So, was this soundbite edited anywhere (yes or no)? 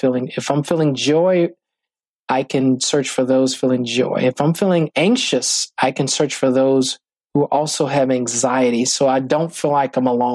no